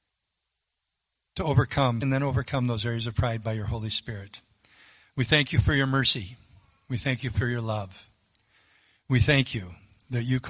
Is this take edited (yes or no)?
yes